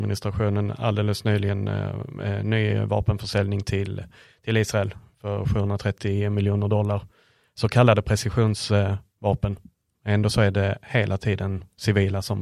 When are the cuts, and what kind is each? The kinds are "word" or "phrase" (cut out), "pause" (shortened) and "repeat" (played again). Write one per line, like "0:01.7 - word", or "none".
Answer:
none